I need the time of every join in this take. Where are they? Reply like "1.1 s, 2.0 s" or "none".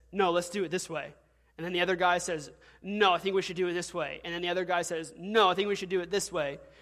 none